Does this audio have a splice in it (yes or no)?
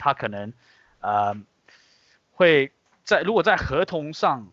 no